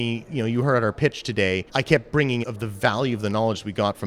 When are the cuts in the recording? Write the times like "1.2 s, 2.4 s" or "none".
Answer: 1.7 s, 2.4 s